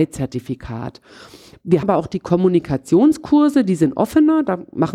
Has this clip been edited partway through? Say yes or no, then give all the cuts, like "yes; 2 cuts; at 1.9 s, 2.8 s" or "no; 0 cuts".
yes; 1 cut; at 1.8 s